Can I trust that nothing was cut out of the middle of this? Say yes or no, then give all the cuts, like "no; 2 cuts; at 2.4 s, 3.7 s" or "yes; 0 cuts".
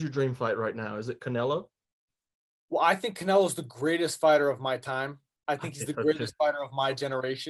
yes; 0 cuts